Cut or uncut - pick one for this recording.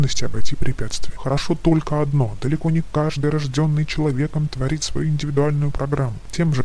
uncut